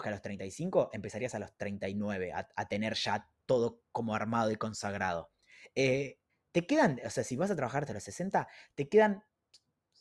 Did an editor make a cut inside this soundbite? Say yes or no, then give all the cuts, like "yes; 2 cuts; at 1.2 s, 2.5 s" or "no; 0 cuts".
yes; 1 cut; at 6.3 s